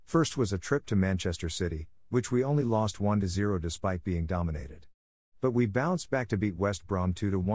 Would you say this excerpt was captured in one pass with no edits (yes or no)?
yes